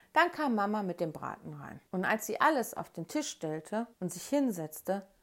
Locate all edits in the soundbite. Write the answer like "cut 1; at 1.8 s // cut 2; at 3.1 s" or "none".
cut 1; at 1.9 s // cut 2; at 3.9 s